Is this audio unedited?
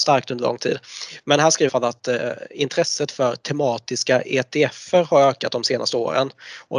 no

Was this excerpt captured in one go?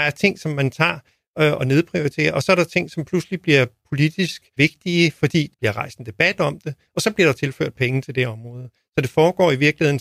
no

